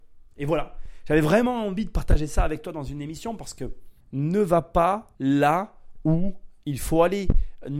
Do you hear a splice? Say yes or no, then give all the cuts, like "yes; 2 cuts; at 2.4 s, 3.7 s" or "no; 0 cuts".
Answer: yes; 2 cuts; at 4.0 s, 5.1 s